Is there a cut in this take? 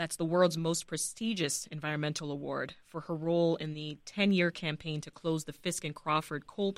no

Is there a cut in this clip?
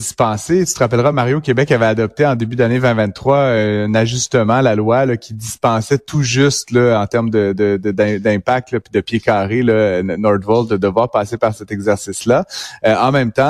no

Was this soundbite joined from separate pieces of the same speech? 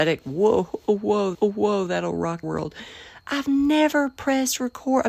yes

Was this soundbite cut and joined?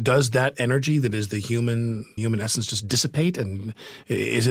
yes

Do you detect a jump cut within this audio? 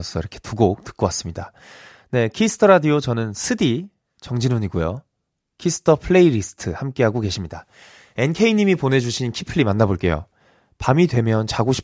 no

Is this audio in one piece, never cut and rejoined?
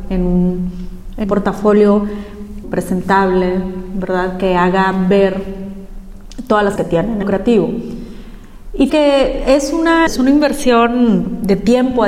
no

